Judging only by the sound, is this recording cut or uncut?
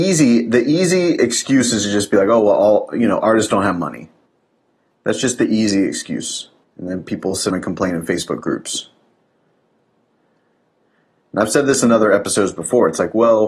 cut